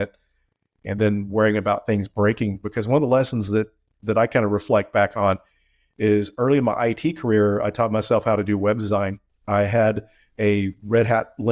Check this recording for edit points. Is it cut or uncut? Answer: uncut